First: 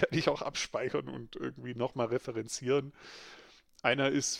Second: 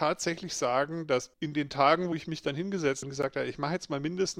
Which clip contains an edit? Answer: second; 2 cuts; at 1.3 s, 3.0 s

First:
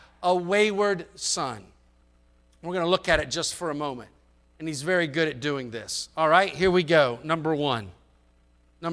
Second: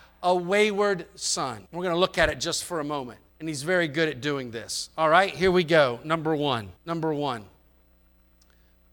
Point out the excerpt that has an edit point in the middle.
second; 3 cuts; at 1.7 s, 3.3 s, 6.8 s

